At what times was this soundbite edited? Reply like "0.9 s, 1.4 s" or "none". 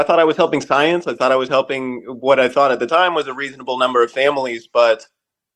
none